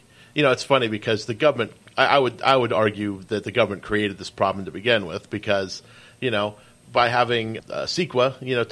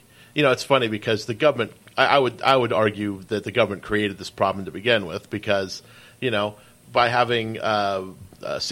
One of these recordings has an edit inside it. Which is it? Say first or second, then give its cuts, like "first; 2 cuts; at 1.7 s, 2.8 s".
first; 1 cut; at 7.6 s